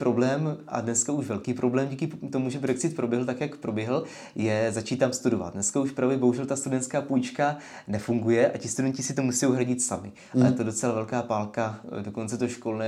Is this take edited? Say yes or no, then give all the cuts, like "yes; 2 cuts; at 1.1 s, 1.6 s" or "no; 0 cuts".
no; 0 cuts